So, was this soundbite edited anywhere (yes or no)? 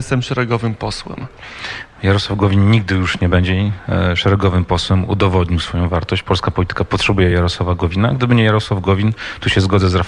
no